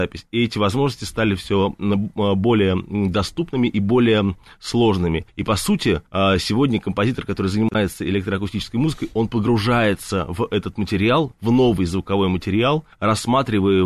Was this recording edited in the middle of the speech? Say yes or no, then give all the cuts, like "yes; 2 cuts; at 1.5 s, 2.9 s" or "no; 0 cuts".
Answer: yes; 3 cuts; at 5.3 s, 6.1 s, 12.9 s